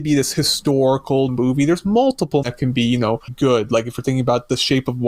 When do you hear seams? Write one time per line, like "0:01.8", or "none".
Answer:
0:01.3
0:02.4
0:03.3